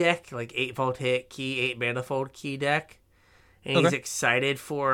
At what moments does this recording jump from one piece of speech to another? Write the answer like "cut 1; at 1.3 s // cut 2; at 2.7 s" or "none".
none